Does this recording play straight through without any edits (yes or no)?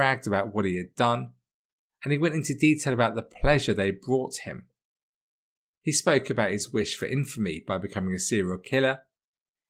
yes